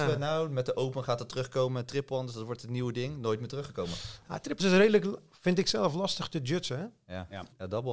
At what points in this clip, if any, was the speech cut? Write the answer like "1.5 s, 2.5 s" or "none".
4.6 s